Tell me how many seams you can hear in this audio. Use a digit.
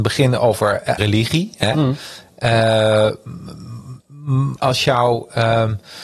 2